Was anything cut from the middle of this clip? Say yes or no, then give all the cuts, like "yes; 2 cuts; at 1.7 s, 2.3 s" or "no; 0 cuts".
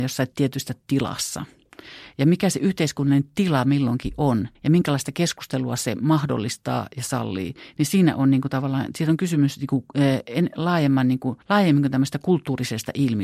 yes; 2 cuts; at 4.6 s, 11.4 s